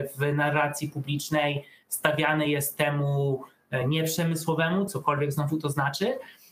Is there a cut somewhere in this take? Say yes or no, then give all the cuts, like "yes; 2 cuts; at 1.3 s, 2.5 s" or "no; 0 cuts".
no; 0 cuts